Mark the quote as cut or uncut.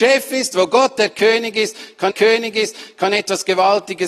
cut